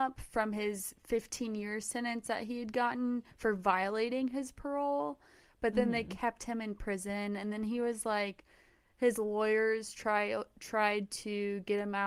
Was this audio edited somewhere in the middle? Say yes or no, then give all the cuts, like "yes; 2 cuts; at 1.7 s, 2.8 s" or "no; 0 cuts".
no; 0 cuts